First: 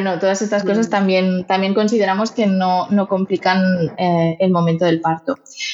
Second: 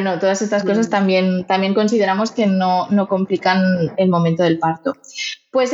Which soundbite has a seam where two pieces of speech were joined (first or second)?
second